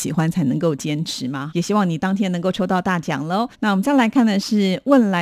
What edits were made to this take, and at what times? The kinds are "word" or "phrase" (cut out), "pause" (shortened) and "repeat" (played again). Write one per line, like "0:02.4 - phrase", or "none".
0:01.5 - word
0:03.5 - pause